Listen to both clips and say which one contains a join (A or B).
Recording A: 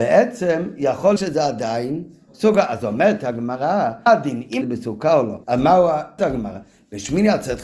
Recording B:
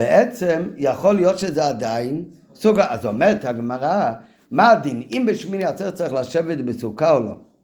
A